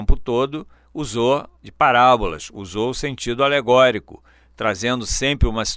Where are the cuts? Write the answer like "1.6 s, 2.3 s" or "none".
1.5 s